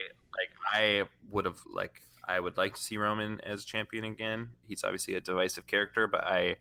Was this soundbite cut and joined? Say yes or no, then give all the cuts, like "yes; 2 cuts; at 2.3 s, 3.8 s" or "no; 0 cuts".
no; 0 cuts